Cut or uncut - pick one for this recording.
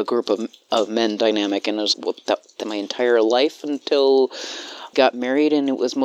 cut